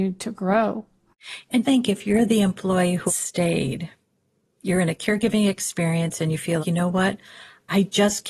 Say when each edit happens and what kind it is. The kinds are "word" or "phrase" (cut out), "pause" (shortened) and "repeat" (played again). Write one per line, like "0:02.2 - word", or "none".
0:01.6 - word
0:03.1 - word
0:06.6 - word